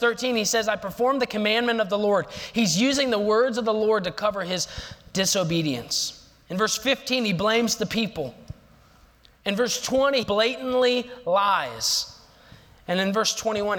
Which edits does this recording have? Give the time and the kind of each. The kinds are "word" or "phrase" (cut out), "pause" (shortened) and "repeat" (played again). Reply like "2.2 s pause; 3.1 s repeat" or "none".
10.2 s word